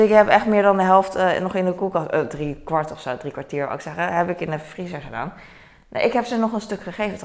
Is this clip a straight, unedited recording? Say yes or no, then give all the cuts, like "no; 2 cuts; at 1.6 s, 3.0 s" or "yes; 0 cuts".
yes; 0 cuts